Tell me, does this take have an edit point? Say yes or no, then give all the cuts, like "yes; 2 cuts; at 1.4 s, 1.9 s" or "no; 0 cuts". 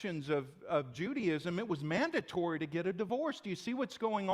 no; 0 cuts